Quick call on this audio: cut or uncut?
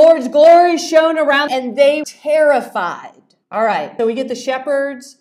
cut